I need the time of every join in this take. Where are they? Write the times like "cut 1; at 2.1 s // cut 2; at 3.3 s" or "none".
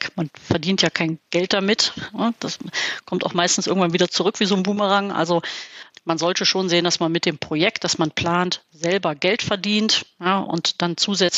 cut 1; at 5.9 s